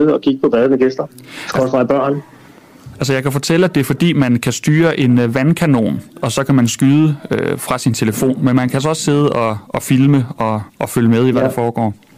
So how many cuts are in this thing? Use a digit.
2